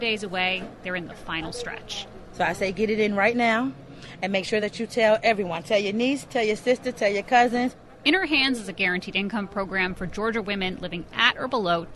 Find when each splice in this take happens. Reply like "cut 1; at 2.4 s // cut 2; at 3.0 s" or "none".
none